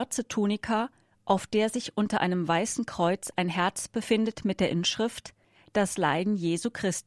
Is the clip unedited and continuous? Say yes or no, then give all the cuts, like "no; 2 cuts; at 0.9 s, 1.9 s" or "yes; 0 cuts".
no; 1 cut; at 5.4 s